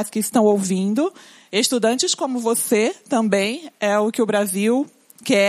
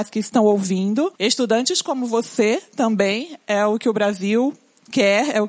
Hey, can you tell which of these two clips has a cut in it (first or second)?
second